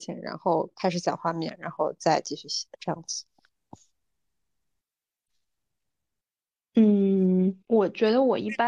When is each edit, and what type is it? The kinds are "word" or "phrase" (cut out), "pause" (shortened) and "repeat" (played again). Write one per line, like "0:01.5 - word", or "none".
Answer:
0:07.6 - pause